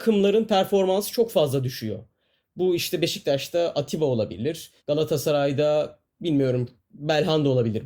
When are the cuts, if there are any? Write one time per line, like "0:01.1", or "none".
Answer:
0:04.8